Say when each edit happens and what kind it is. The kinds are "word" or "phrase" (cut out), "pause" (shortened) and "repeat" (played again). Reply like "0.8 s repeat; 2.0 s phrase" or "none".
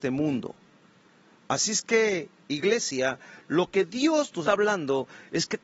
4.4 s word